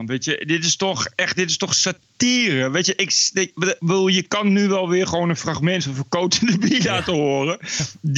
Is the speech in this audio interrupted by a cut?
no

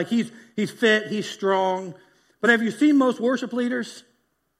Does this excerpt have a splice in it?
no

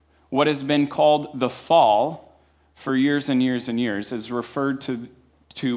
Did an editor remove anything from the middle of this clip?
no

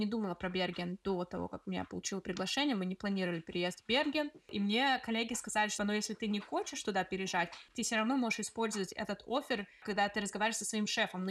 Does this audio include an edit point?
no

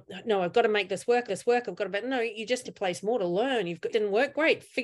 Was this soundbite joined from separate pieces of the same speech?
yes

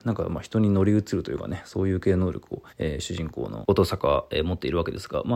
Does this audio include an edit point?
yes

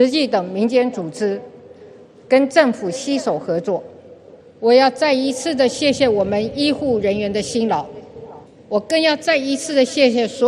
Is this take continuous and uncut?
no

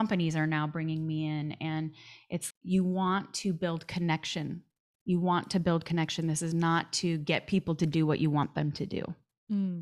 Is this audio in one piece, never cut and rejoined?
no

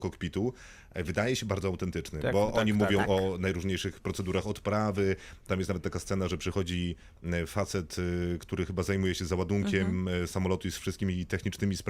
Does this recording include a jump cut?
no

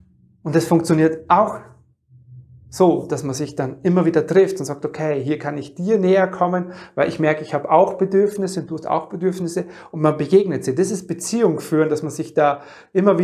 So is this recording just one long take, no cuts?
yes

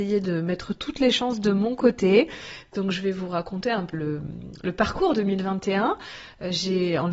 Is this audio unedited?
no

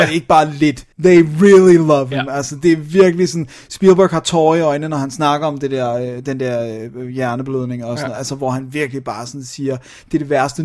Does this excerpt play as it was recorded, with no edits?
no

